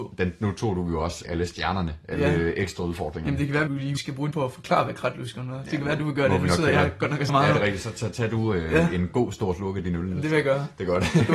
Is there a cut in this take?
yes; 5 cuts; at 1.2 s, 3.7 s, 4.0 s, 4.3 s, 7.3 s

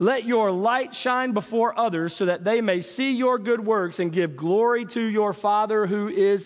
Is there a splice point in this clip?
no; 0 cuts

